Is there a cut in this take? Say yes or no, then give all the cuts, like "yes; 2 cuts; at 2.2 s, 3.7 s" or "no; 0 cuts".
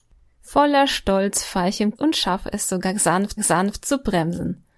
yes; 2 cuts; at 2.0 s, 3.4 s